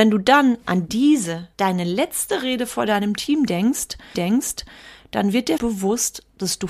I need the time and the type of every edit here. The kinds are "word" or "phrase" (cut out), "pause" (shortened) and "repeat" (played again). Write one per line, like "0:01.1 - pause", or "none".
0:01.5 - pause
0:04.1 - repeat
0:05.6 - word